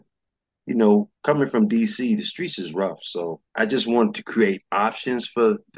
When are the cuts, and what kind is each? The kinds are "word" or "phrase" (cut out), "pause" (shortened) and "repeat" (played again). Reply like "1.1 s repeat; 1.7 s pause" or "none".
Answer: 3.5 s pause